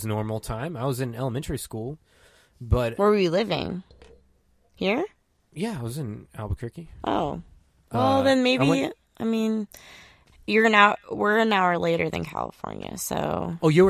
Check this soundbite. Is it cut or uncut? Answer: uncut